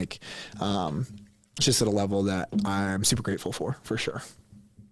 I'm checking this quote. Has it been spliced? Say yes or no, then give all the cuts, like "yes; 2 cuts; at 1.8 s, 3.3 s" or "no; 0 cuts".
no; 0 cuts